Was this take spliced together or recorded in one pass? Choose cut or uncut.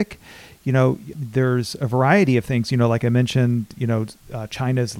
cut